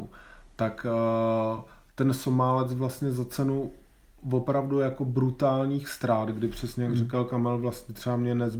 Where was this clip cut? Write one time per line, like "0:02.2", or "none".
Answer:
none